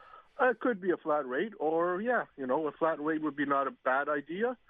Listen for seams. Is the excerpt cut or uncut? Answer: cut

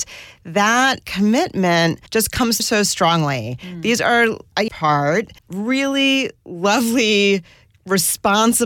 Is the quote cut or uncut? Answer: cut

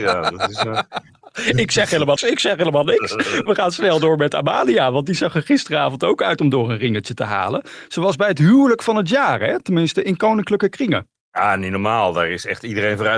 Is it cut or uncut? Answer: cut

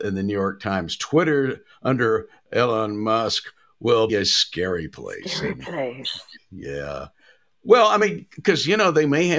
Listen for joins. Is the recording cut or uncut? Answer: cut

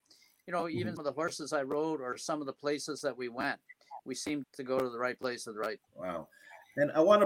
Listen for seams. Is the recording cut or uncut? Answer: cut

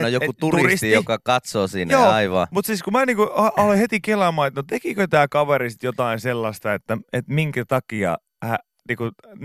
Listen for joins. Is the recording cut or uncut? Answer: uncut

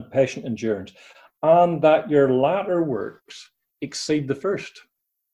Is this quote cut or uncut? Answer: uncut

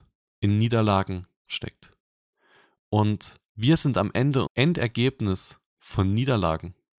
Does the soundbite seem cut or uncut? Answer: cut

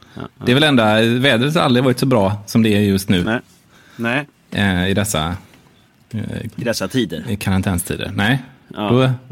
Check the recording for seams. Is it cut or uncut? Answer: uncut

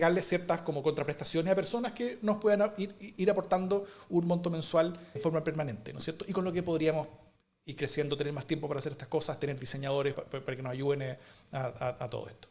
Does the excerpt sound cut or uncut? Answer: cut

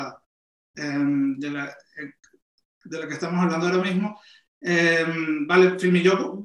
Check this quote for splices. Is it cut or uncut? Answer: uncut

